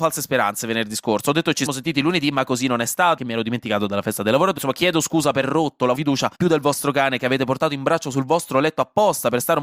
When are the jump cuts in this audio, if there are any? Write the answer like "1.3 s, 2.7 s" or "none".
1.7 s, 3.2 s, 4.6 s, 5.4 s, 5.9 s, 6.3 s